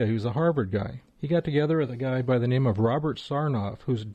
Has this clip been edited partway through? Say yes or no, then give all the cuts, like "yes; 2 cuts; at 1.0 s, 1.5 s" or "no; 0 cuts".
yes; 1 cut; at 1.1 s